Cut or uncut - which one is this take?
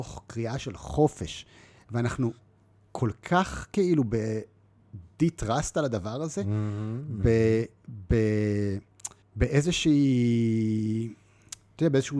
cut